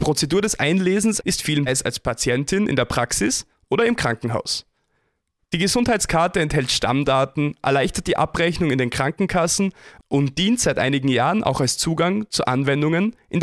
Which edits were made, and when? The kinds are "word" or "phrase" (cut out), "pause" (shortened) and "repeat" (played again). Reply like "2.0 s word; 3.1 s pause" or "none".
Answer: 1.2 s phrase; 1.7 s phrase